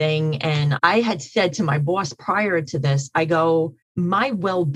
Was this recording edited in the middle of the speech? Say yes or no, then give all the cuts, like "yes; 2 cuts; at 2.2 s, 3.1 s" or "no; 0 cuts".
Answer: yes; 1 cut; at 3.8 s